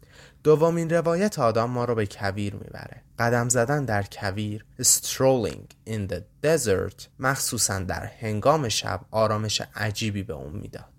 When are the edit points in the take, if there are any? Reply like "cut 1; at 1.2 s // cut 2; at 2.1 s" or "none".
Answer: cut 1; at 3.1 s // cut 2; at 4.7 s // cut 3; at 7.1 s